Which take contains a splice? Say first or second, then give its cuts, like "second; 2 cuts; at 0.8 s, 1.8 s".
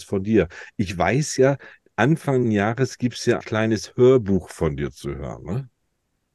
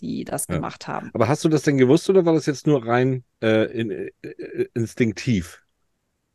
first; 2 cuts; at 2.4 s, 3.4 s